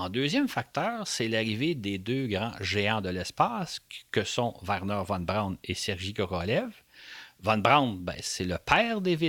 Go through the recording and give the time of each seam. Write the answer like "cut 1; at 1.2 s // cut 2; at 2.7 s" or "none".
none